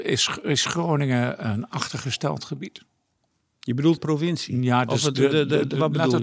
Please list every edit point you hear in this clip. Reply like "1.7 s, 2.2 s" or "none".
4.0 s